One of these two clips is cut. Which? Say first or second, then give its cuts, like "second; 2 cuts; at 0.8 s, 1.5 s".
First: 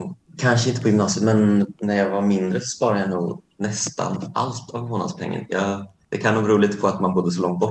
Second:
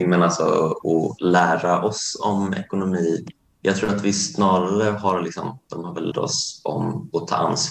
second; 1 cut; at 6.1 s